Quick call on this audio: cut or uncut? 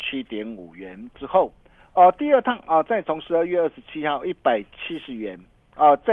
uncut